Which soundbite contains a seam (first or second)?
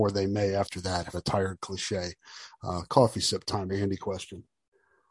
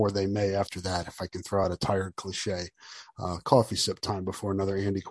first